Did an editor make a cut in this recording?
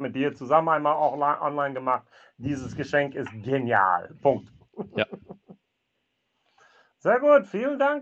no; 0 cuts

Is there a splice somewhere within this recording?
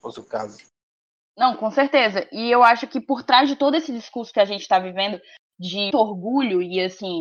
yes; 1 cut; at 5.9 s

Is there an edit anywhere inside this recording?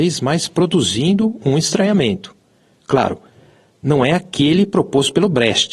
no; 0 cuts

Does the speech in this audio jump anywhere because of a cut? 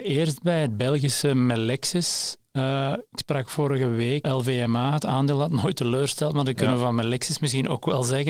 yes; 1 cut; at 4.2 s

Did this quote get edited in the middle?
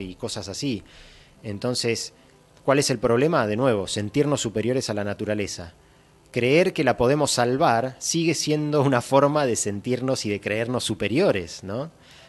no; 0 cuts

